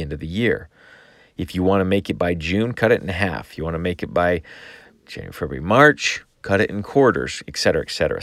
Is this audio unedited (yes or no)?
yes